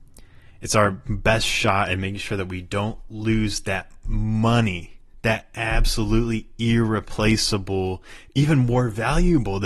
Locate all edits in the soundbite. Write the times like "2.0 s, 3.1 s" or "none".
none